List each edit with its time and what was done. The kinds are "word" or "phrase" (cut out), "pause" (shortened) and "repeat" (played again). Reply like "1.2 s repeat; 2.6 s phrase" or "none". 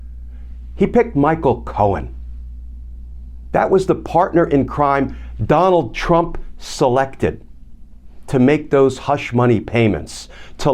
none